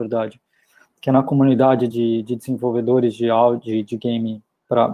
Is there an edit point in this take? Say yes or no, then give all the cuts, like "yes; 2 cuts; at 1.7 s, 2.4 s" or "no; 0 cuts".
no; 0 cuts